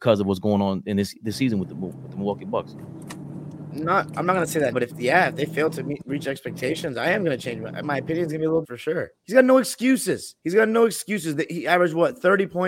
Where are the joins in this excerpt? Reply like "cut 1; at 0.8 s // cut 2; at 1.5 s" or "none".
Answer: cut 1; at 4.7 s // cut 2; at 7.8 s // cut 3; at 8.6 s // cut 4; at 9.2 s // cut 5; at 10.4 s